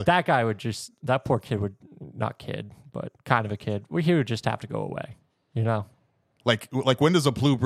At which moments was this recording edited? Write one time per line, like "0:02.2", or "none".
none